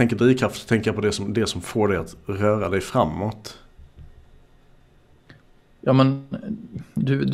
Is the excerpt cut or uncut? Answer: uncut